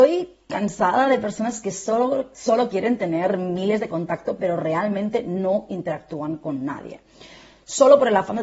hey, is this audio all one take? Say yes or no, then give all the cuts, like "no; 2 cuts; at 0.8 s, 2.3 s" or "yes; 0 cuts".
yes; 0 cuts